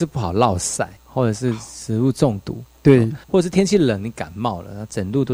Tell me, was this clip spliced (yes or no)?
yes